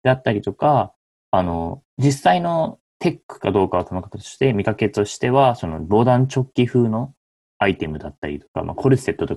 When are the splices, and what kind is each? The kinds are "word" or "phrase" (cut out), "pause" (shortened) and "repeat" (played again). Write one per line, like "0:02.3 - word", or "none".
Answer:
0:01.2 - pause
0:01.9 - pause
0:02.9 - pause